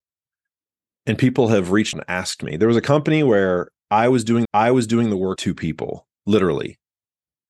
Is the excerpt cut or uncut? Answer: cut